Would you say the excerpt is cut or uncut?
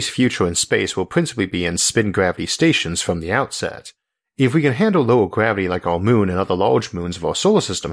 uncut